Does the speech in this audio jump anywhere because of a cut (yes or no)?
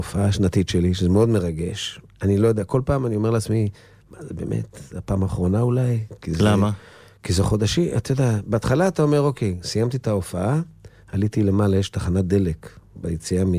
no